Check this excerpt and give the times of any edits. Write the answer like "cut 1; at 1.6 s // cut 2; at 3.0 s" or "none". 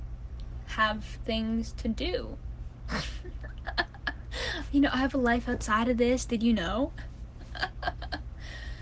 none